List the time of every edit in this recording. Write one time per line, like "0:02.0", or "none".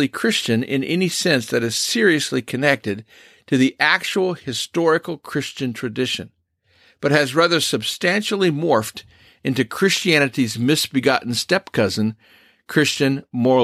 none